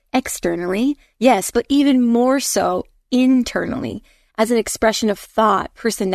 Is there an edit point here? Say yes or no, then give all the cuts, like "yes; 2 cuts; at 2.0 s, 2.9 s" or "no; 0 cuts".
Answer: no; 0 cuts